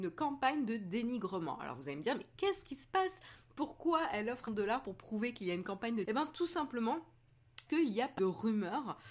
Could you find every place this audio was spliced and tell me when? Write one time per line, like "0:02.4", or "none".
0:04.5
0:06.0
0:07.7
0:08.2